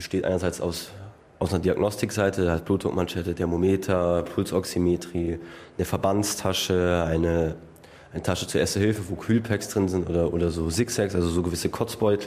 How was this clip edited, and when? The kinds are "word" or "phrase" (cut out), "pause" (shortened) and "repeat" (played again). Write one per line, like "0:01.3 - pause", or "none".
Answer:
none